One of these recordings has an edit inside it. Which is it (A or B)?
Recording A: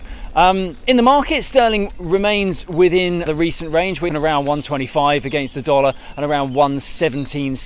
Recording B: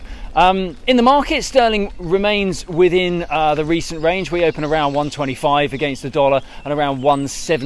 A